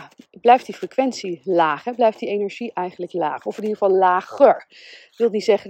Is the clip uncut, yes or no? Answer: yes